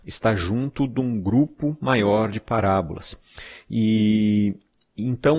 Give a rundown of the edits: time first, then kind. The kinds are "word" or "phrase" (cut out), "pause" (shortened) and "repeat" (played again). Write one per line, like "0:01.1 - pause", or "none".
none